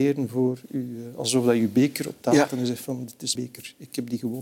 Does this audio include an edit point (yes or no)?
yes